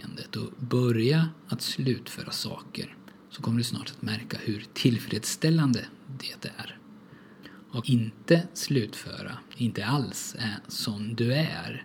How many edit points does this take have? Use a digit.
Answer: 3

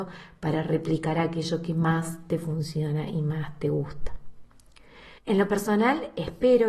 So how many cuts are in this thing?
1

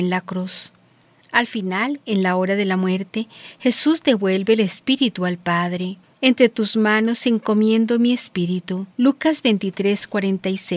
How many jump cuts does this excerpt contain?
2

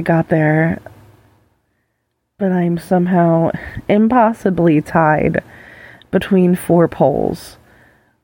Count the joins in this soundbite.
0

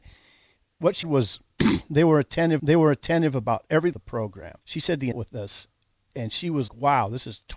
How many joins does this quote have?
6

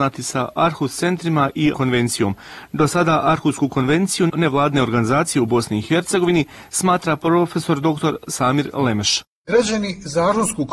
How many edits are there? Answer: 2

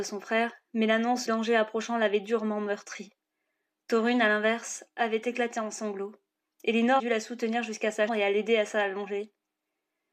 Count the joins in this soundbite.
3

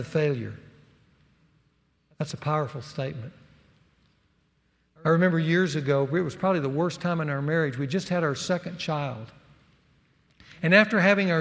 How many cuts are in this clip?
0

